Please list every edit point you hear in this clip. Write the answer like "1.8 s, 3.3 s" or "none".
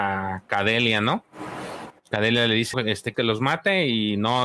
2.7 s, 3.1 s

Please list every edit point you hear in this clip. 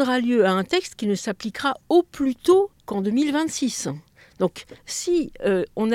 2.8 s, 4.8 s

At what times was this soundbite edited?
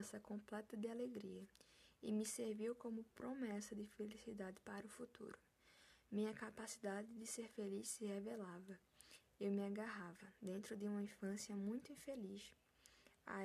none

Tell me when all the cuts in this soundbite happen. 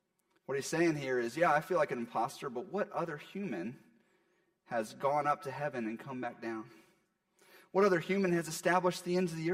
none

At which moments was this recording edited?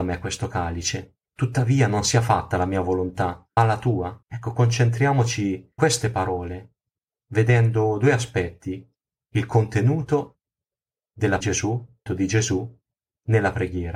1.3 s, 3.6 s, 4.2 s, 5.8 s, 11.4 s, 12.1 s

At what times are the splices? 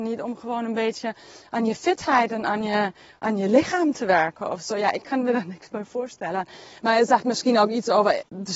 none

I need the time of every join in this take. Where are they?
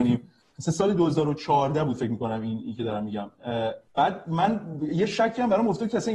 3.9 s

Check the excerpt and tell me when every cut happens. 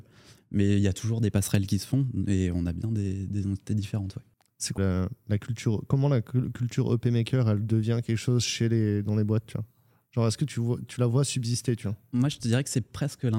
4.8 s

